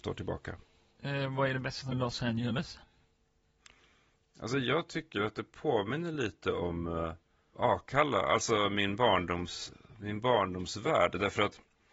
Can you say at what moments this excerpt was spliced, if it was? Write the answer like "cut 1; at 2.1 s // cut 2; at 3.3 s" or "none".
cut 1; at 1.9 s // cut 2; at 7.5 s